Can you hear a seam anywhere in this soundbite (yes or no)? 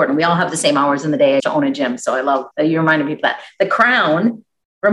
yes